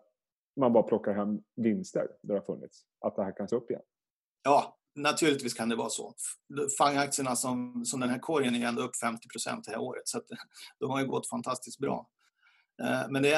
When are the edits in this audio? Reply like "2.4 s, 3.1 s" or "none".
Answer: 3.5 s, 4.9 s